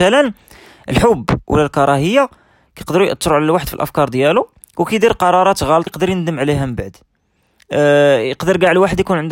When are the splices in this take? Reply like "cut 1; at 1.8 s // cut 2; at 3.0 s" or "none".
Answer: cut 1; at 5.9 s